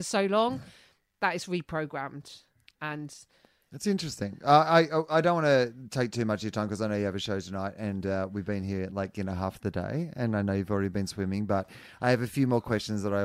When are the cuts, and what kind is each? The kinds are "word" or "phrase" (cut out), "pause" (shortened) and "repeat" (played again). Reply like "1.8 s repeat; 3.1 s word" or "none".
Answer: none